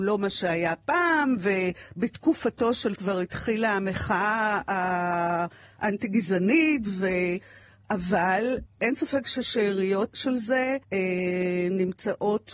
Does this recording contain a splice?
yes; 4 cuts; at 3.0 s, 8.7 s, 10.1 s, 10.8 s

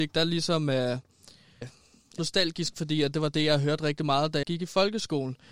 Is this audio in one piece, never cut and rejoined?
no; 4 cuts; at 1.6 s, 2.2 s, 2.8 s, 4.4 s

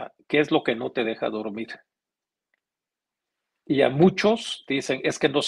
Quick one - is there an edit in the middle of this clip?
no; 0 cuts

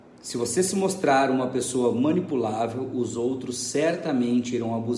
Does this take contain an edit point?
no; 0 cuts

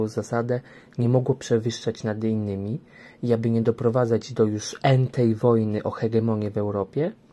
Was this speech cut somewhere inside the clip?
no; 0 cuts

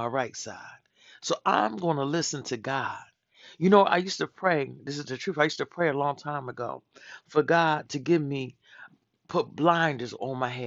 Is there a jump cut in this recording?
no; 0 cuts

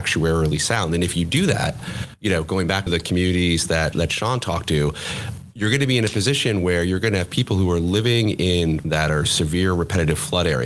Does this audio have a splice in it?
yes; 3 cuts; at 2.9 s, 3.9 s, 8.8 s

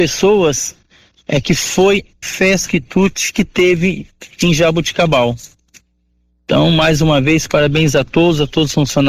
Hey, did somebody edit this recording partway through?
yes; 2 cuts; at 2.2 s, 2.7 s

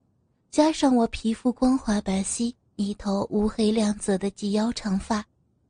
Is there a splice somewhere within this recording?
yes; 1 cut; at 2.6 s

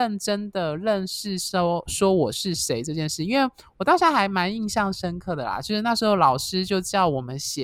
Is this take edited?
no; 0 cuts

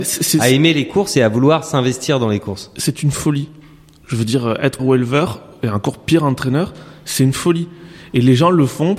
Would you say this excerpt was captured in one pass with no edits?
no; 1 cut; at 4.8 s

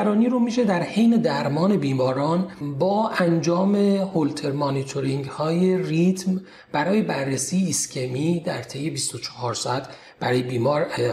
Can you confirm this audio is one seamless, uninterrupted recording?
yes; 0 cuts

